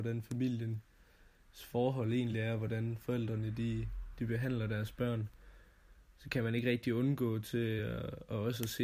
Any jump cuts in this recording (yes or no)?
no